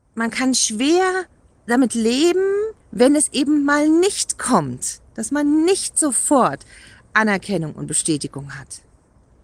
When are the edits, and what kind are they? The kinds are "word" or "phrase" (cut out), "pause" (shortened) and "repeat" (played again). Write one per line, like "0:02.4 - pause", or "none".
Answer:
0:02.8 - pause